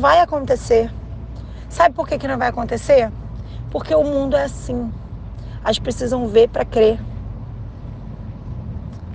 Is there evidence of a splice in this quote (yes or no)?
yes